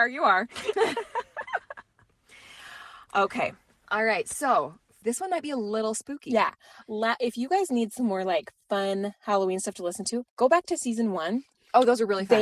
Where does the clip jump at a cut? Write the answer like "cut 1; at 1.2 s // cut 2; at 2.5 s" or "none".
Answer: cut 1; at 10.3 s